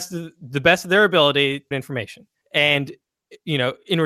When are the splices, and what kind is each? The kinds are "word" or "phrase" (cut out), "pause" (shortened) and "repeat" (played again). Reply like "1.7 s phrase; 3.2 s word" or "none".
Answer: 1.7 s word; 2.4 s pause